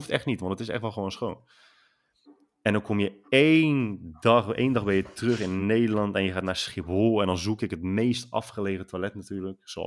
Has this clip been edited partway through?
no; 0 cuts

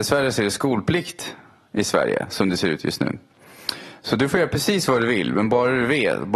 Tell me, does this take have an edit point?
no; 0 cuts

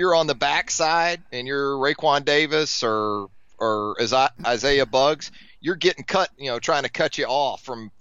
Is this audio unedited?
no; 2 cuts; at 1.2 s, 6.3 s

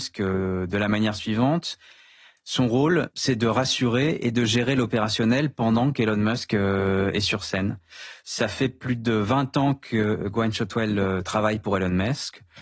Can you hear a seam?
no; 0 cuts

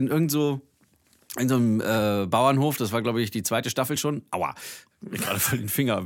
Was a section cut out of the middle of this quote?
no; 0 cuts

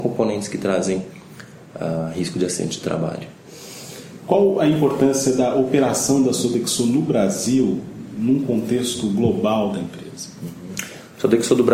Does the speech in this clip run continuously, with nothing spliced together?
yes; 0 cuts

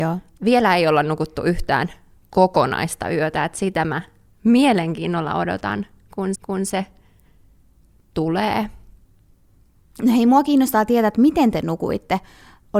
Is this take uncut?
no; 1 cut; at 6.4 s

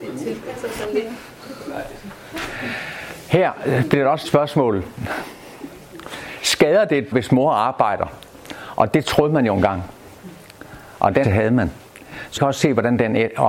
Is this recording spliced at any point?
yes; 4 cuts; at 4.2 s, 7.1 s, 11.2 s, 12.4 s

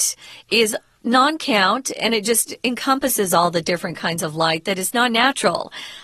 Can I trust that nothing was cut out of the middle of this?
yes; 0 cuts

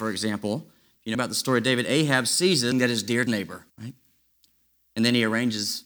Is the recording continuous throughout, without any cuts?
no; 4 cuts; at 1.1 s, 2.7 s, 3.3 s, 3.7 s

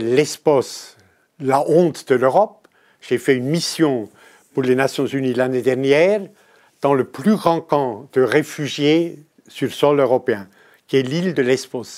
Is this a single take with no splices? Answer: yes; 0 cuts

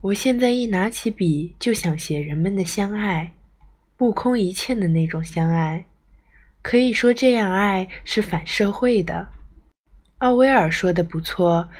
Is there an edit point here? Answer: no; 0 cuts

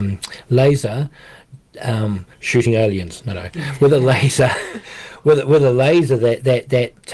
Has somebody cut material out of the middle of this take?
yes; 1 cut; at 2.3 s

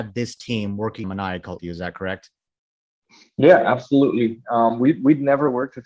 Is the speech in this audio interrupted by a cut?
yes; 2 cuts; at 1.0 s, 1.6 s

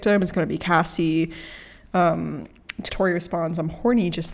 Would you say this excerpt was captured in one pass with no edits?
no; 1 cut; at 2.9 s

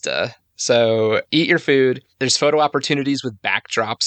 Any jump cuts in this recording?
yes; 2 cuts; at 1.3 s, 2.1 s

